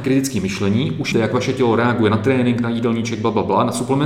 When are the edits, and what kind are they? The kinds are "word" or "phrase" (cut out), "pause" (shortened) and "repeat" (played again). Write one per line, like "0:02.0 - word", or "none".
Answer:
0:01.1 - word